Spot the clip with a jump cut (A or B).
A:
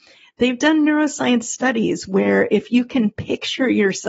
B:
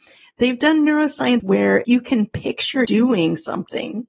B